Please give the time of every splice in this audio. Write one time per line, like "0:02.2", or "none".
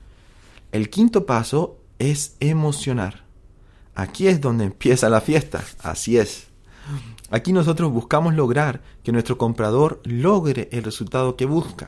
none